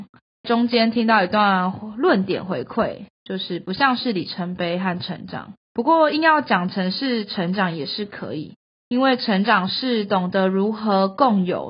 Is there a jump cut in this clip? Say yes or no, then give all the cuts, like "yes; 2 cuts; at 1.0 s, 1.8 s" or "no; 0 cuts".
yes; 1 cut; at 5.6 s